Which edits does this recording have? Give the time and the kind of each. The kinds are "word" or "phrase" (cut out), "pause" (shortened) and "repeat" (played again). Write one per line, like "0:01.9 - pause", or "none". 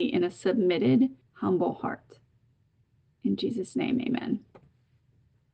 none